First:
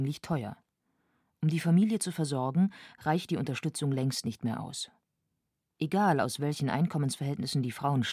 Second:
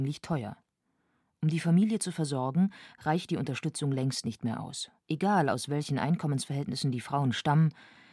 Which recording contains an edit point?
second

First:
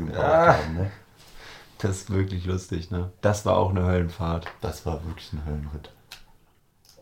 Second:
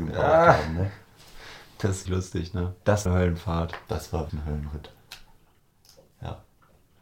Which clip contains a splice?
second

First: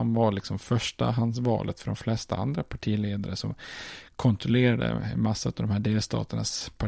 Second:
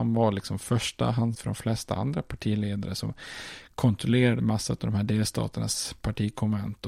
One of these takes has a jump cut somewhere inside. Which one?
second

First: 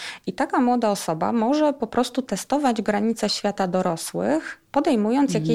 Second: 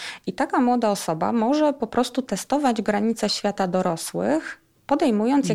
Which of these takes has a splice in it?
first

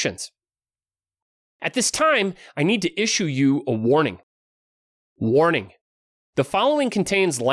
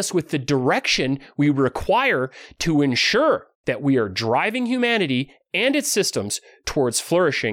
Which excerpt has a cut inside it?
second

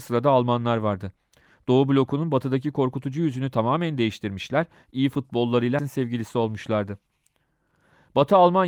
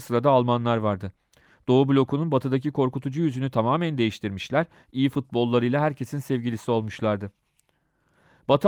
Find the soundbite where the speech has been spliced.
first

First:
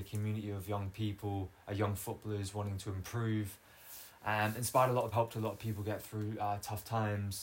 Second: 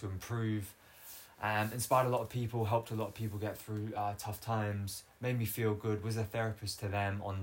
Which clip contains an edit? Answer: first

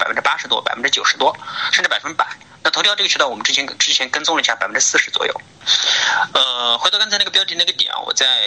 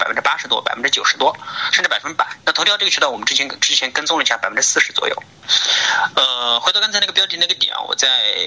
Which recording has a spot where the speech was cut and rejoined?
second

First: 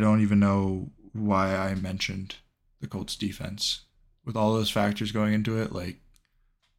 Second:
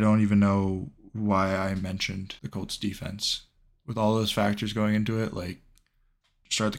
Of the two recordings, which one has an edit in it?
second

